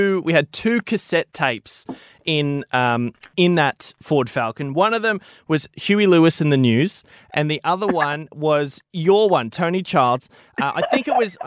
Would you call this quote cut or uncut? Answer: cut